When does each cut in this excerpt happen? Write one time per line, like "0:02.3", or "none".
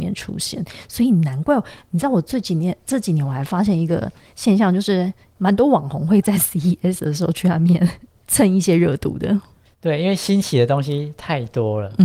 none